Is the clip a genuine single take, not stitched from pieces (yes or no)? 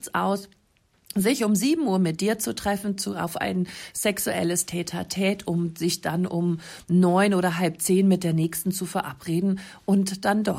yes